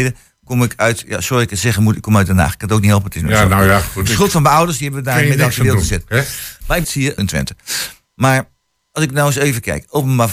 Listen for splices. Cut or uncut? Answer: cut